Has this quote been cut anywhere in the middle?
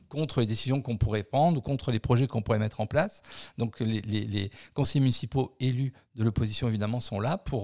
no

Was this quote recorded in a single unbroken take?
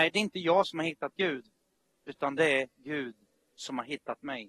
yes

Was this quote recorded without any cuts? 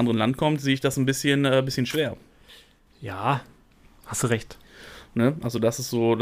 yes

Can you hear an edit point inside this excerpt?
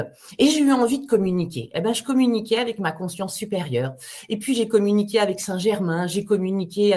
no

